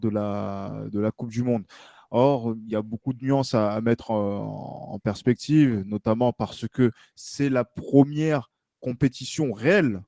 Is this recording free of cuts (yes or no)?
yes